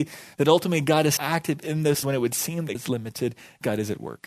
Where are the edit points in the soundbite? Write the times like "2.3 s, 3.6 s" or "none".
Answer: 1.2 s, 2.0 s, 2.7 s